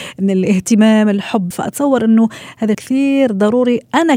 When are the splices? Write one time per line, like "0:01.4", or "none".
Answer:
0:01.5
0:02.7